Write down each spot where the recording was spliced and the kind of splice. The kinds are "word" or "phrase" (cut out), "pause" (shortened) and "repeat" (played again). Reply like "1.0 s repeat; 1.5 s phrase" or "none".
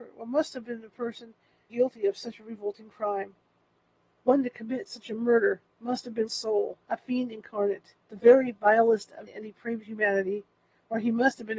1.7 s phrase; 3.7 s pause; 6.3 s phrase; 6.8 s pause; 8.0 s pause; 9.3 s word